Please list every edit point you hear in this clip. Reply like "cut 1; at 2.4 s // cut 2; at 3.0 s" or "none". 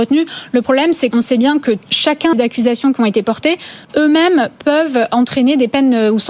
cut 1; at 1.1 s // cut 2; at 2.3 s // cut 3; at 3.8 s